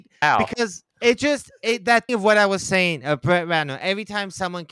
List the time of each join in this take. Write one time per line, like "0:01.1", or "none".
0:00.9
0:02.1